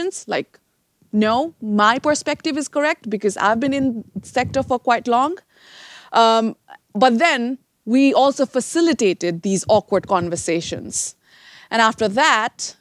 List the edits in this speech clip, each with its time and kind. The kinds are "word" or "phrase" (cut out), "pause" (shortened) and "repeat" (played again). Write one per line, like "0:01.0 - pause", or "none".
0:07.7 - pause